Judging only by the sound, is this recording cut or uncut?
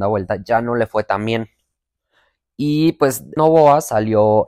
cut